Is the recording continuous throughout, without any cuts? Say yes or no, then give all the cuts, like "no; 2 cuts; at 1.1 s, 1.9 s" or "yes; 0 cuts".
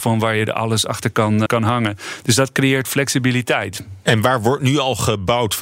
no; 1 cut; at 1.5 s